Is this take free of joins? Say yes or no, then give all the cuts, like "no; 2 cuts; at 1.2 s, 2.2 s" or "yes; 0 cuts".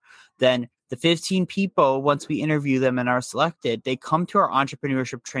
yes; 0 cuts